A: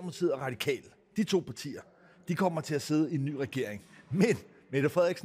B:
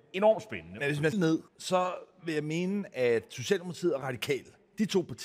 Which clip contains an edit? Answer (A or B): B